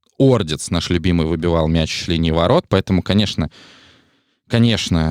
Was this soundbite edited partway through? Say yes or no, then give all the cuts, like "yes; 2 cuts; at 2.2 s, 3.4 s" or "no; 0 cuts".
yes; 1 cut; at 2.1 s